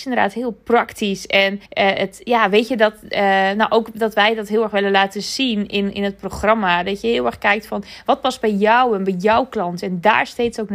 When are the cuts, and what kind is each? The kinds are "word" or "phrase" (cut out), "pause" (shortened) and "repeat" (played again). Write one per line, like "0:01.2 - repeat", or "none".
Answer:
0:01.6 - pause